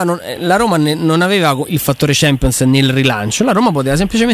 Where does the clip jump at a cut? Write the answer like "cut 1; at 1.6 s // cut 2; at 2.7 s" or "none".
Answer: none